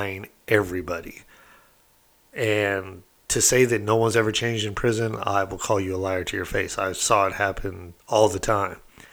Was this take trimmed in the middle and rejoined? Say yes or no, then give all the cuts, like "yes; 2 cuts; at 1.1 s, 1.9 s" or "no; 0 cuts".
yes; 1 cut; at 8.0 s